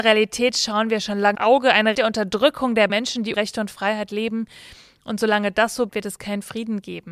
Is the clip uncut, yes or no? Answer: no